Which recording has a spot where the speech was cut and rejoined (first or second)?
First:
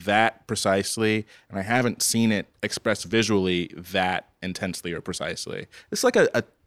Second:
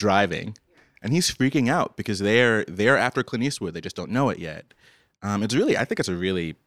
first